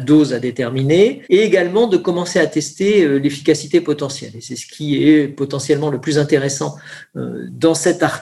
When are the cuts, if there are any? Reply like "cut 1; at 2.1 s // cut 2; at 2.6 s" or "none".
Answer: cut 1; at 1.2 s